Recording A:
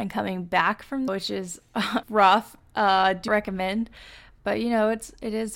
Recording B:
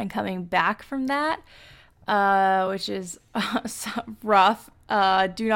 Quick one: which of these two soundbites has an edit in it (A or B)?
A